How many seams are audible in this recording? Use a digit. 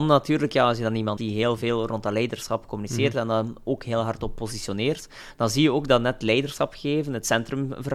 1